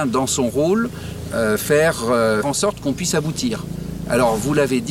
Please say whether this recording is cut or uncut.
cut